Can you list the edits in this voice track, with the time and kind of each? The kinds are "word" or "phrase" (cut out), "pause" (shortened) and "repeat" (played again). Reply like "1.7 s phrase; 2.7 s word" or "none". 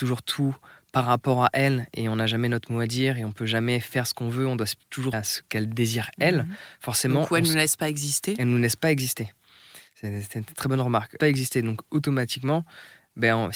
5.1 s phrase; 11.2 s phrase